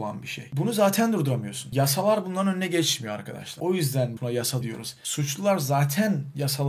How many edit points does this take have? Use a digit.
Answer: 2